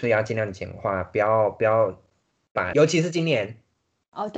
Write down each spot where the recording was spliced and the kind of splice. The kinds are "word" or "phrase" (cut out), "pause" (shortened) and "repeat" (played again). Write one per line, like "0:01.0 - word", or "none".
0:02.7 - word